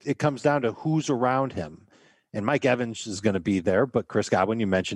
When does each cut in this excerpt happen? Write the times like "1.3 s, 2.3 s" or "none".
none